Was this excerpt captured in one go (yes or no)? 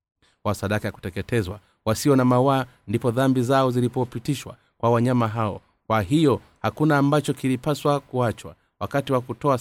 yes